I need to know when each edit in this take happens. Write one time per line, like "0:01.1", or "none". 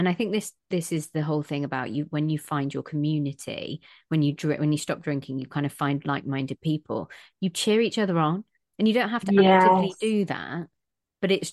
none

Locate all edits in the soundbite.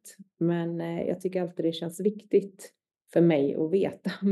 none

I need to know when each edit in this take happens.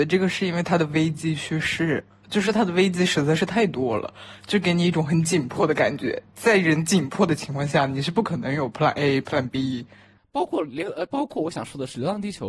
none

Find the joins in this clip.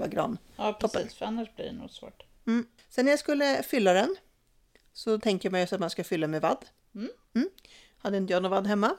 none

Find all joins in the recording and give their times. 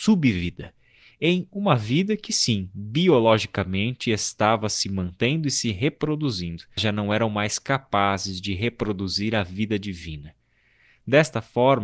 0:06.8

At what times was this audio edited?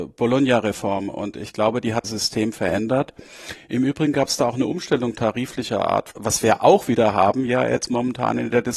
0:02.0
0:06.1

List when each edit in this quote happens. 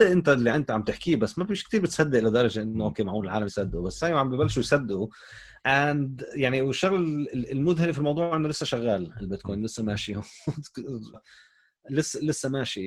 0:03.5
0:05.6
0:11.1

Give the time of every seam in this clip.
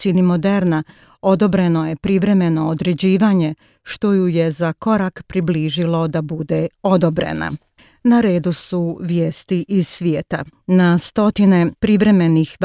none

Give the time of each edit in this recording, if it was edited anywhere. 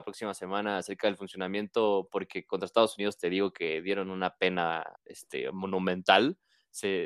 0:04.9

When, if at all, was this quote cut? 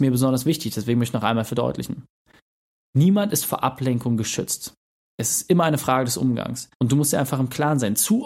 0:06.7

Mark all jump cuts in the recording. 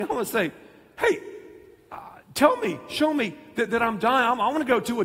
0:03.7

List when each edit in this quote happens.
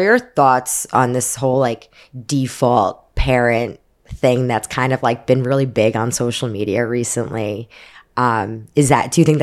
none

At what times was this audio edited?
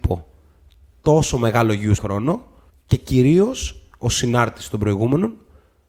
0:02.0
0:02.7

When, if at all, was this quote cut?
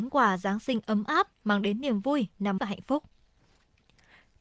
0:02.6

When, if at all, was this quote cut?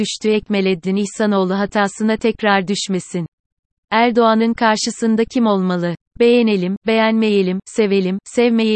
none

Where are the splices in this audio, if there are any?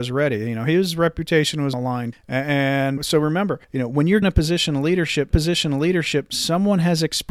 0:01.7
0:02.1
0:03.0
0:03.6
0:04.2
0:05.3

